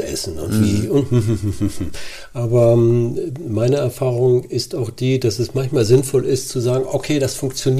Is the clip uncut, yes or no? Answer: yes